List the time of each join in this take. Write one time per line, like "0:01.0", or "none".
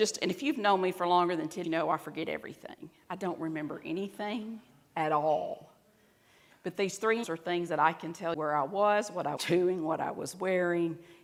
0:01.6
0:07.2
0:08.3
0:09.4